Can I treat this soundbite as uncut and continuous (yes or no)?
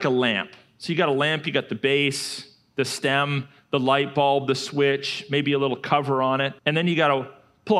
no